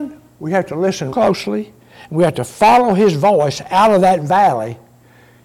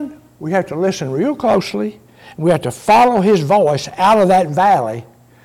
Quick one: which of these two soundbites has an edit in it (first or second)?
first